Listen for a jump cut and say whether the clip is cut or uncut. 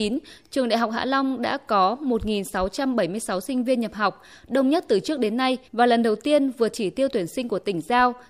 cut